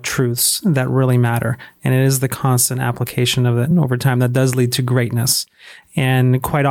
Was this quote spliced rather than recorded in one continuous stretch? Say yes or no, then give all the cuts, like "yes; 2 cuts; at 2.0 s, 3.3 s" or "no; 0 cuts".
no; 0 cuts